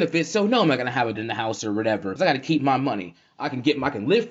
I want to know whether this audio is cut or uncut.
cut